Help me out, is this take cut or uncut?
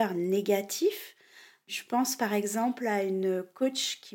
uncut